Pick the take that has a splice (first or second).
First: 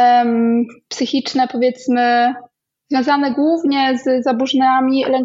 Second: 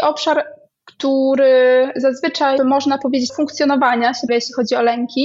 second